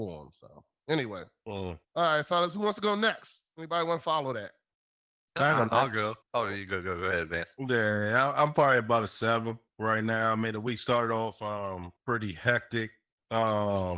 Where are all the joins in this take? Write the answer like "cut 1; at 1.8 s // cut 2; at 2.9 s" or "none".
cut 1; at 1.8 s // cut 2; at 4.8 s // cut 3; at 6.2 s // cut 4; at 9.7 s // cut 5; at 12.0 s